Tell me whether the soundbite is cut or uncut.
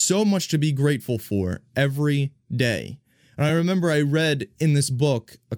uncut